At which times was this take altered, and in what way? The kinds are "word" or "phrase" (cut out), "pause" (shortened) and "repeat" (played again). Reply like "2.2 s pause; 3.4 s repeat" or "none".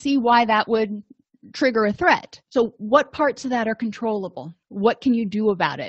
2.4 s pause; 4.6 s pause